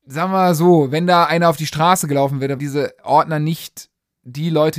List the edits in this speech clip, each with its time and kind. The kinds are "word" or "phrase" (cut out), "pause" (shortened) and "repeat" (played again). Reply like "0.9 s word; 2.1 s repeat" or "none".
2.6 s word